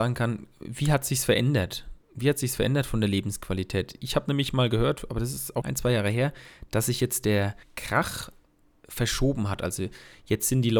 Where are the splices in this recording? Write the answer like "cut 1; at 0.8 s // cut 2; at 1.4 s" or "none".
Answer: cut 1; at 2.0 s // cut 2; at 5.6 s // cut 3; at 7.6 s